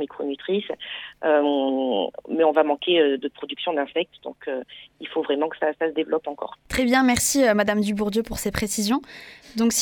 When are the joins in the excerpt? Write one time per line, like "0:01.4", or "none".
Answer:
0:03.2
0:06.6